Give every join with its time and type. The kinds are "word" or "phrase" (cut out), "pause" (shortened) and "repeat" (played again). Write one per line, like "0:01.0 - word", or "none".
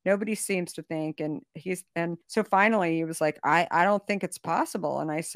0:02.2 - pause